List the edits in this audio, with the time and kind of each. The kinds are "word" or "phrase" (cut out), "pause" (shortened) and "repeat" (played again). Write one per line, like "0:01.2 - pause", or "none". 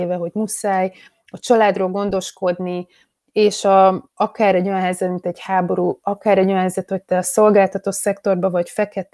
none